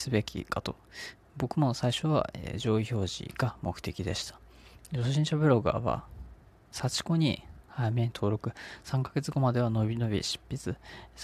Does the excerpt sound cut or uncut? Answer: uncut